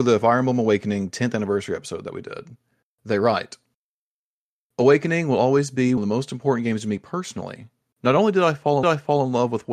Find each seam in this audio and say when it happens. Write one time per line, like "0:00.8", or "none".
0:06.0
0:08.8